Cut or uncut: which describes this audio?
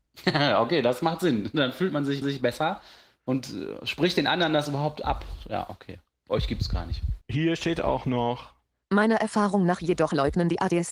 cut